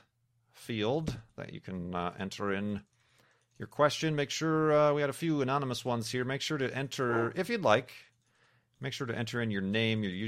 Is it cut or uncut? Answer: uncut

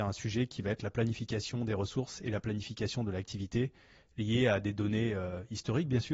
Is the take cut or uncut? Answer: uncut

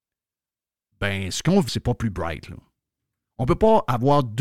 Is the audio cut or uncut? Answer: cut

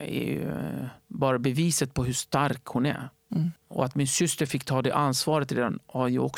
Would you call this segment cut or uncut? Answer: cut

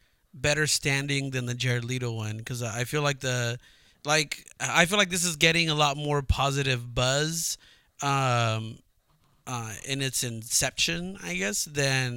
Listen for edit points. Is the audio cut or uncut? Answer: uncut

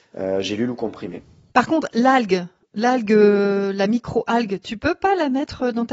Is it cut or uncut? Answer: uncut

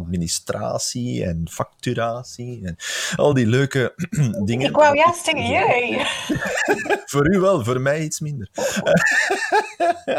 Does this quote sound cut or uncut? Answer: uncut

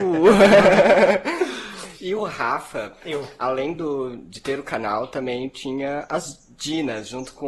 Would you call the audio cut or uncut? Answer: uncut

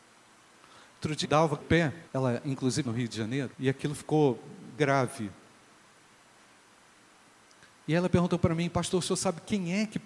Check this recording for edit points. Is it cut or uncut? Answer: cut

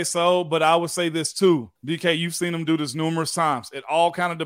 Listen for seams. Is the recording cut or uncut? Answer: cut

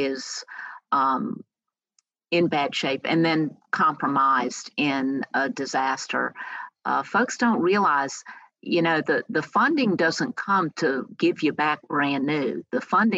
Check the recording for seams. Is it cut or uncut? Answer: uncut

